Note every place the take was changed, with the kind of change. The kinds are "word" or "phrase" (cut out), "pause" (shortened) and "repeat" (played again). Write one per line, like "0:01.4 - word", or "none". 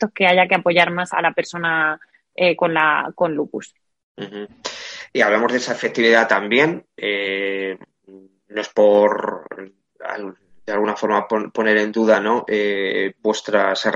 0:01.1 - word